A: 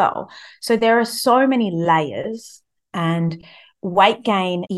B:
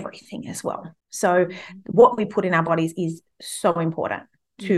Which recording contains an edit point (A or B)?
B